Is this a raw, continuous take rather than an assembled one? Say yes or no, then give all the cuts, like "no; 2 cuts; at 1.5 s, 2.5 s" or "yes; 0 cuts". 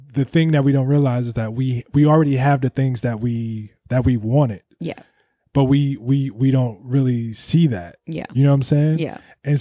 yes; 0 cuts